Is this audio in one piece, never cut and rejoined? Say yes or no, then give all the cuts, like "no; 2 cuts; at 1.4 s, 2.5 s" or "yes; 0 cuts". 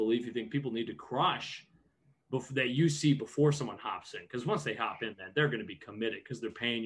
yes; 0 cuts